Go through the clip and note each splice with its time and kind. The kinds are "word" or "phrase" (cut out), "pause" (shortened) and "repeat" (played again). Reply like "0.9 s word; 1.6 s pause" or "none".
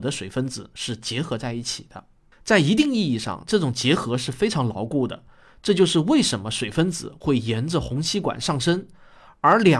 none